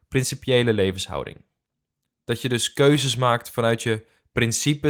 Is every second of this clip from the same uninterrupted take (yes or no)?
yes